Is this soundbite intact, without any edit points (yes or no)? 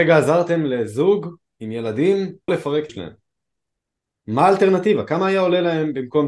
no